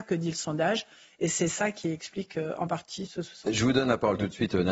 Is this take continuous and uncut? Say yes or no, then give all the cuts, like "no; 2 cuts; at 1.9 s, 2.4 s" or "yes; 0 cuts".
no; 1 cut; at 3.1 s